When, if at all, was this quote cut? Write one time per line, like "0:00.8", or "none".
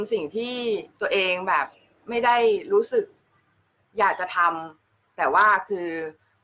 none